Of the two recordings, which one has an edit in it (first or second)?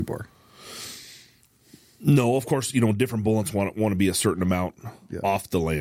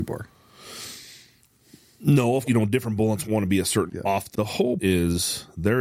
second